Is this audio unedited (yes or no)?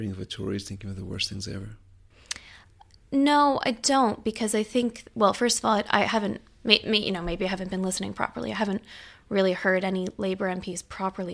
yes